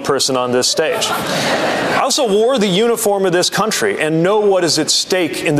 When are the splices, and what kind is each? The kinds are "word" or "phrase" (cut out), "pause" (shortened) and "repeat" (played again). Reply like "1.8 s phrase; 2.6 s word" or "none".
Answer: none